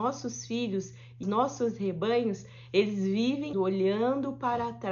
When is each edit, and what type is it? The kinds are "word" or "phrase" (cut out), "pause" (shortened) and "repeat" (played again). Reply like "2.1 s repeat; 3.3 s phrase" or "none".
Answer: 1.2 s word; 3.5 s word